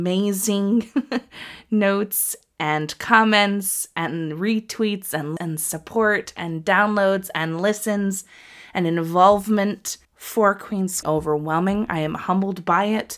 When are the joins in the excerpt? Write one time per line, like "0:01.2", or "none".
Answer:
0:05.4
0:10.0
0:11.0